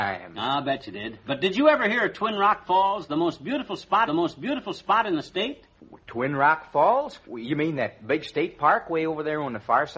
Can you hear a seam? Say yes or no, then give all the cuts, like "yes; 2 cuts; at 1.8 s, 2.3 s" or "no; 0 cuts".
yes; 2 cuts; at 4.1 s, 7.2 s